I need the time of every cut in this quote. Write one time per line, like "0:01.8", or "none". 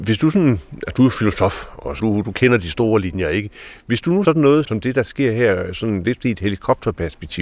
0:02.0
0:04.2
0:04.6